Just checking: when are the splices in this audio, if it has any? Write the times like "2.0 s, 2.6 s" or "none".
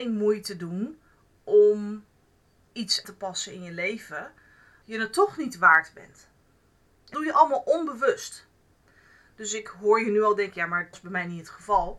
3.0 s, 4.8 s, 7.1 s, 10.9 s